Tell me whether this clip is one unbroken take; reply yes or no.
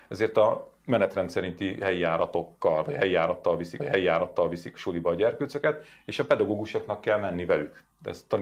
no